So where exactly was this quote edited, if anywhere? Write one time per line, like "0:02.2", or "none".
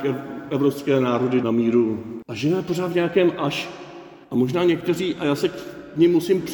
0:01.4
0:04.2